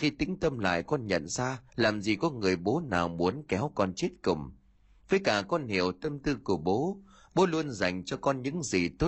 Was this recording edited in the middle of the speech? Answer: yes; 1 cut; at 1.7 s

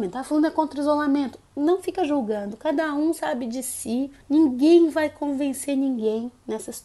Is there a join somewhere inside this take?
yes; 1 cut; at 4.2 s

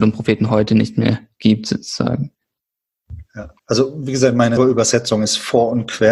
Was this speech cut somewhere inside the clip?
yes; 2 cuts; at 3.6 s, 4.6 s

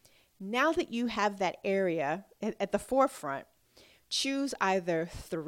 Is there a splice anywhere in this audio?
no; 0 cuts

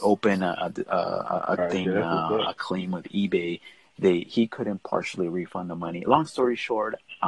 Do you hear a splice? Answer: no; 0 cuts

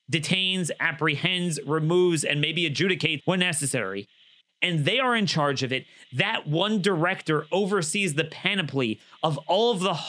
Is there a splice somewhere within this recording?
yes; 1 cut; at 3.2 s

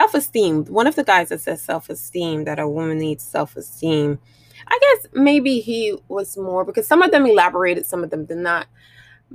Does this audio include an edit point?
no; 0 cuts

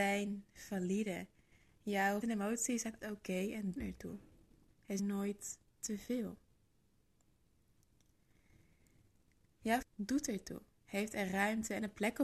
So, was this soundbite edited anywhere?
yes; 5 cuts; at 2.2 s, 3.0 s, 3.8 s, 5.0 s, 9.8 s

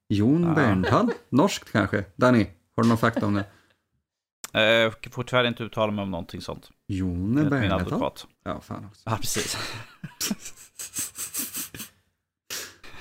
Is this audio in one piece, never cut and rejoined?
no; 1 cut; at 8.3 s

